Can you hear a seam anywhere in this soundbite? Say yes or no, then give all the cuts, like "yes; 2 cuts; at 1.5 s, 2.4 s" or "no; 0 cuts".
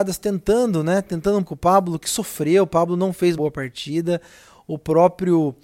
yes; 2 cuts; at 1.4 s, 3.4 s